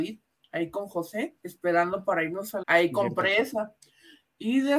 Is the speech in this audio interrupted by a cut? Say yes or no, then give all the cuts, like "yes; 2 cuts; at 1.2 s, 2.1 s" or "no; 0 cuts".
yes; 2 cuts; at 1.4 s, 2.6 s